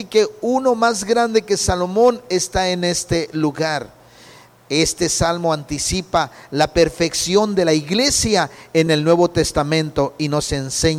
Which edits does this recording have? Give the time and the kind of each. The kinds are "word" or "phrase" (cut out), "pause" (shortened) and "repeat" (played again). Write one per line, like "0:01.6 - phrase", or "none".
none